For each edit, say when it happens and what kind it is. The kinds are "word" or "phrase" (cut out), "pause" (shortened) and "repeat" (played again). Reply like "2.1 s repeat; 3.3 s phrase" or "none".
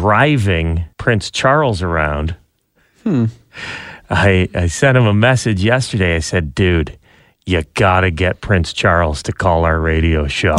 0.9 s pause